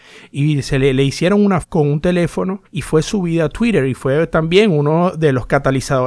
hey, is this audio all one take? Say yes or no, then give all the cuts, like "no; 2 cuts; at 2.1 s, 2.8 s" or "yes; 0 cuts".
no; 2 cuts; at 1.6 s, 2.6 s